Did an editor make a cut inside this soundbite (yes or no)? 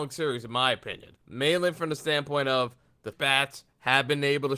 yes